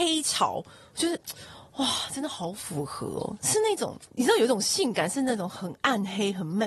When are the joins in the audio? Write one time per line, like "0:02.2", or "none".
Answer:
none